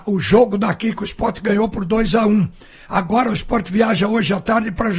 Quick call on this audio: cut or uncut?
uncut